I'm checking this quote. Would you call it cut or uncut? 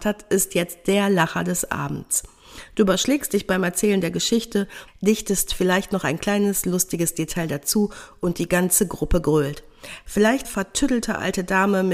cut